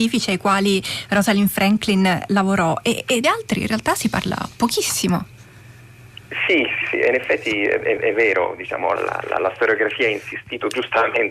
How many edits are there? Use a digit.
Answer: 4